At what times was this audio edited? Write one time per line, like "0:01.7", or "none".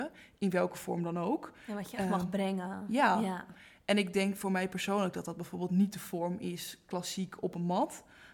none